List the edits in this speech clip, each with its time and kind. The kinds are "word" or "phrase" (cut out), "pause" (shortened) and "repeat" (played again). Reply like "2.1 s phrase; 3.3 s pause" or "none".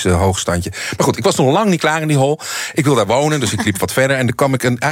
3.1 s word